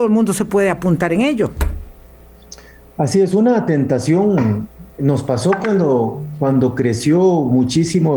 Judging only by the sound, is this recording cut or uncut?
uncut